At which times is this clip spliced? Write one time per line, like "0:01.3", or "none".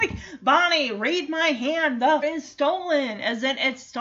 0:02.2